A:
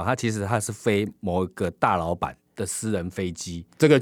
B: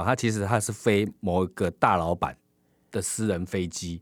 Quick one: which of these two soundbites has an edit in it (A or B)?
A